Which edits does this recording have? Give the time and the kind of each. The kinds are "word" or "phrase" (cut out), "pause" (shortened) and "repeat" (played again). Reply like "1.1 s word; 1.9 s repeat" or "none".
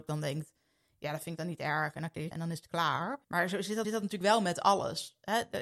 2.3 s phrase; 3.2 s pause; 3.8 s repeat